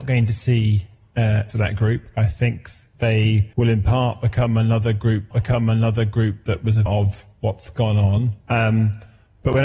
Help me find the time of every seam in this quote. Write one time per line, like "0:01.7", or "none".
0:01.5
0:03.5
0:05.3
0:06.9
0:07.3
0:08.4